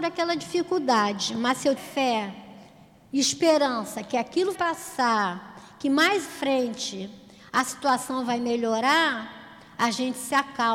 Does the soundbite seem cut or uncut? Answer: cut